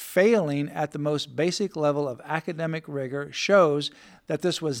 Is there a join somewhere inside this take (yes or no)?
no